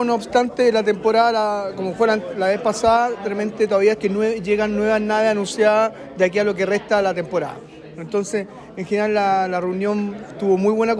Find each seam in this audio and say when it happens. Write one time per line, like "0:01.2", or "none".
0:03.9

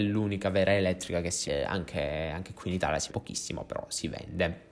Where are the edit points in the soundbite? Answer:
0:01.5
0:03.1

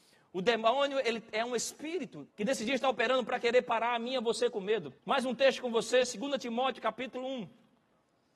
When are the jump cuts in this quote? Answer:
0:02.3
0:05.0

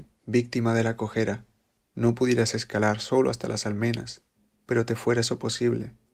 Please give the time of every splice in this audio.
none

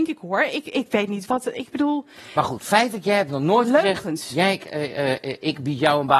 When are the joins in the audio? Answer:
0:01.3

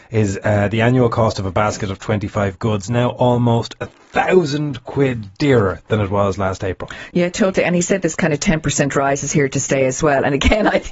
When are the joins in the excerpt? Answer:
none

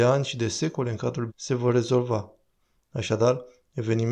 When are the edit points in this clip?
0:01.3

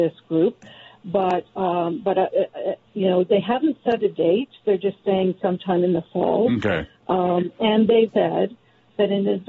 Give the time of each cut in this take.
0:08.1

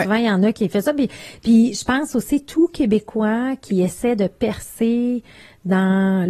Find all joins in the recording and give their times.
none

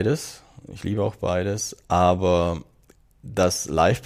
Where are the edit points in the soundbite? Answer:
none

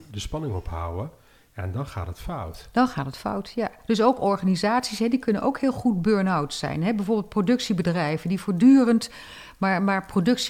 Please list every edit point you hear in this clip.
none

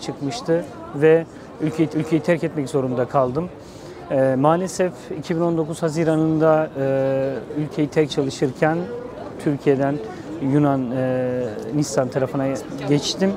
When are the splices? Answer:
0:01.9
0:08.1

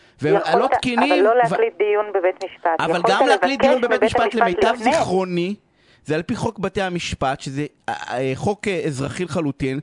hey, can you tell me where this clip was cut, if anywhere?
none

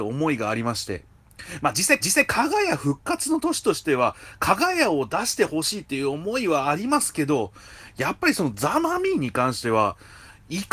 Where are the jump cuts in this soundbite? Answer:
0:02.0

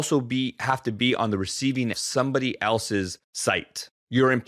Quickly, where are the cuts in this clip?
0:01.9
0:03.2

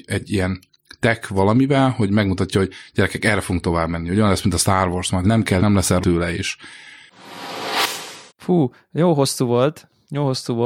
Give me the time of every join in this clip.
0:05.2
0:05.6
0:06.0
0:08.3

